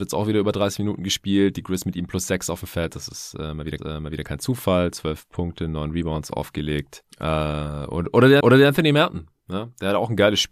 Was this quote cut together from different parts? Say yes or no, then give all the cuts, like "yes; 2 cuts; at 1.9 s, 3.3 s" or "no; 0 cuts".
yes; 2 cuts; at 3.8 s, 8.4 s